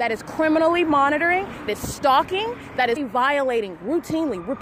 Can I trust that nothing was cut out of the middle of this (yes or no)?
no